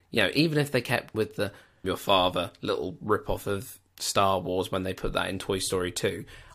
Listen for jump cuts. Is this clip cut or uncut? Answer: cut